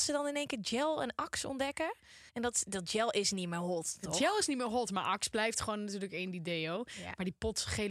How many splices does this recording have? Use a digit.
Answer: 1